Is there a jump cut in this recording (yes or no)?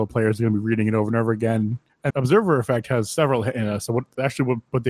yes